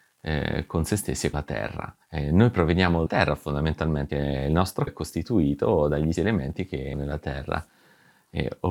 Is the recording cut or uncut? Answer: cut